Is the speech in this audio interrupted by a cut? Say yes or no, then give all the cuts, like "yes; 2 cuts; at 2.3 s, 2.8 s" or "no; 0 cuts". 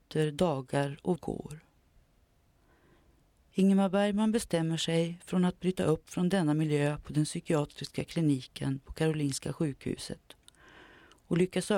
yes; 1 cut; at 1.2 s